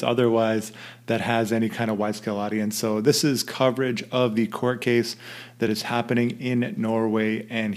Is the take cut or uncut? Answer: uncut